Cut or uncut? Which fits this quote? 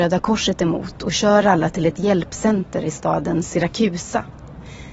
uncut